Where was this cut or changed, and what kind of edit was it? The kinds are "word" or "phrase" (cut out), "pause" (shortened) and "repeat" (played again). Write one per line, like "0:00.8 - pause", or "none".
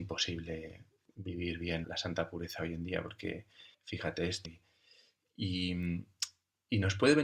0:01.8 - word
0:03.7 - pause
0:04.4 - phrase